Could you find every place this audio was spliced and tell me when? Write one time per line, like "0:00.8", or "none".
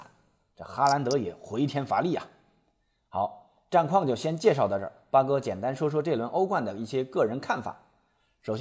none